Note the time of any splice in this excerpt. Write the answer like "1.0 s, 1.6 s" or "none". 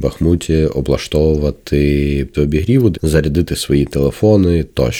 2.3 s, 2.9 s